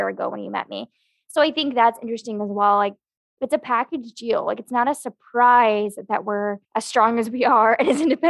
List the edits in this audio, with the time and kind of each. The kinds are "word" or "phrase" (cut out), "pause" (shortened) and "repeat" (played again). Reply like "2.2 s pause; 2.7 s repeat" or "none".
6.6 s pause

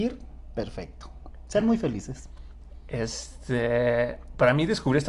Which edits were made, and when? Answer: none

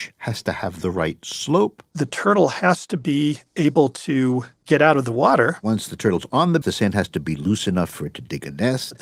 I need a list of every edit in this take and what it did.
6.6 s word

